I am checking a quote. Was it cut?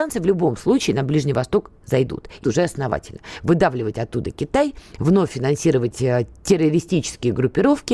yes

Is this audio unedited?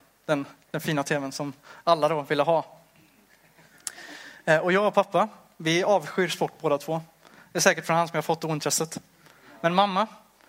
yes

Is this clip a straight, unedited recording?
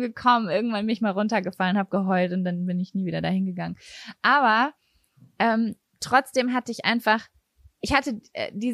yes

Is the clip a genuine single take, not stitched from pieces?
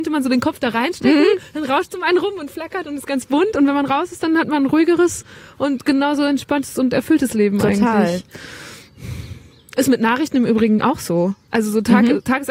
yes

